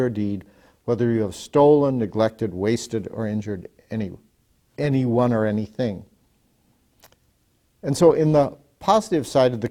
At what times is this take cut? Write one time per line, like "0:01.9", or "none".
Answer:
none